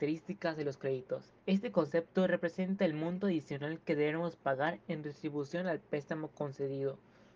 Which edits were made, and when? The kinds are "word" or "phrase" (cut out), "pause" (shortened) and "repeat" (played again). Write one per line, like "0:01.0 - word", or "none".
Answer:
0:01.4 - pause